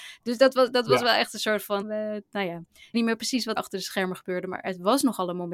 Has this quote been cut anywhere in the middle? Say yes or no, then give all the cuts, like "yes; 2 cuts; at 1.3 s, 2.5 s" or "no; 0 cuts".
yes; 3 cuts; at 1.8 s, 2.9 s, 3.6 s